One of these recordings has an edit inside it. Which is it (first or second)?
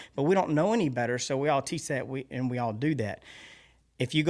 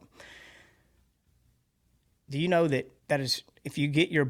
second